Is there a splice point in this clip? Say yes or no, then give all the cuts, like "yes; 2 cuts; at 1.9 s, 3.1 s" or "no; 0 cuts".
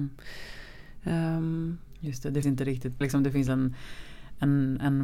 yes; 2 cuts; at 2.4 s, 3.0 s